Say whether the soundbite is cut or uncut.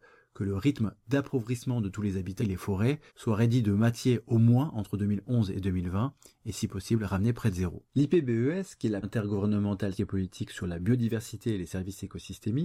cut